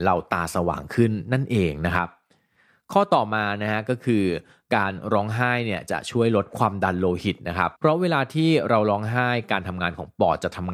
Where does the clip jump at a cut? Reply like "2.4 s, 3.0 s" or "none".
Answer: 7.8 s